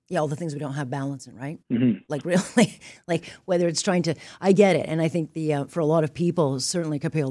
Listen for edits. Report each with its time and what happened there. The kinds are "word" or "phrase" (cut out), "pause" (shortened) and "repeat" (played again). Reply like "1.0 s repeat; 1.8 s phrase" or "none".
1.6 s pause